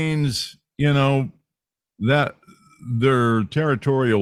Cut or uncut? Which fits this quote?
uncut